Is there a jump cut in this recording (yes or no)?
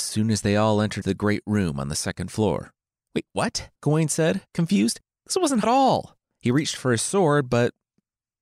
yes